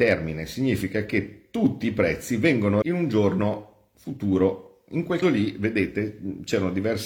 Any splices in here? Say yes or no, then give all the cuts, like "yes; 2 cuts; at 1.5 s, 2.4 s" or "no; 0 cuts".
yes; 2 cuts; at 2.8 s, 5.2 s